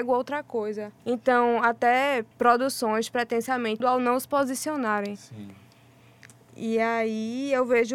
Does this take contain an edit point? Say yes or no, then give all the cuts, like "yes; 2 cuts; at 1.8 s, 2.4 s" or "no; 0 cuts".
yes; 3 cuts; at 1.0 s, 2.3 s, 3.8 s